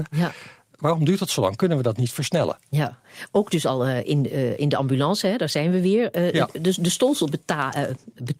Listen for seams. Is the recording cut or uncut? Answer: uncut